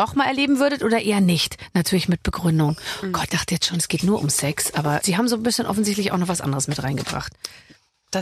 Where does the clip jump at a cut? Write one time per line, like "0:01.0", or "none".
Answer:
0:03.3
0:05.0